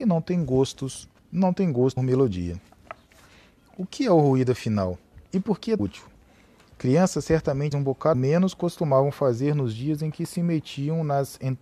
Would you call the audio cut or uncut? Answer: cut